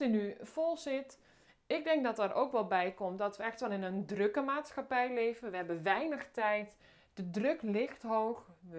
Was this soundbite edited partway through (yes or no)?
no